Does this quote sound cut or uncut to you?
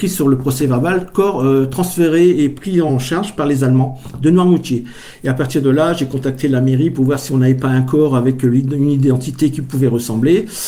cut